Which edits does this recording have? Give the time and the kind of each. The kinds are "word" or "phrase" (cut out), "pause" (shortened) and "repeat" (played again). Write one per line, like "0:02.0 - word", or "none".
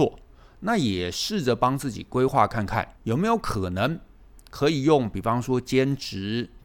0:03.0 - pause